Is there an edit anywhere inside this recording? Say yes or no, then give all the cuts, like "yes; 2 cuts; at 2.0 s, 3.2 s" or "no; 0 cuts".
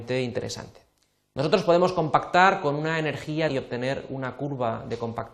yes; 1 cut; at 3.5 s